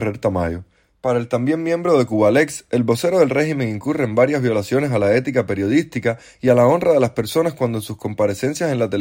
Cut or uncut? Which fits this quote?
uncut